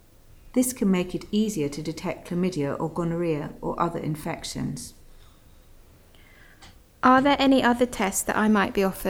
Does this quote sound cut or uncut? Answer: uncut